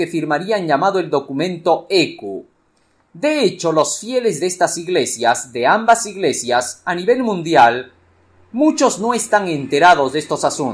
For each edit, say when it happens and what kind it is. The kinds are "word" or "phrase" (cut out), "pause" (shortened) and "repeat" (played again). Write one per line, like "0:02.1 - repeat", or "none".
none